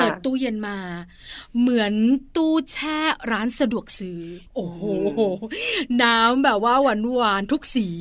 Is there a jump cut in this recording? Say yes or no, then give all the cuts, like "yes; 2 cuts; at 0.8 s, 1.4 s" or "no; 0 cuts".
yes; 1 cut; at 4.5 s